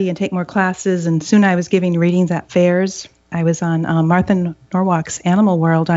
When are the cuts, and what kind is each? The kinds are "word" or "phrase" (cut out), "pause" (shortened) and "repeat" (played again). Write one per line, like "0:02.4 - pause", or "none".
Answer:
none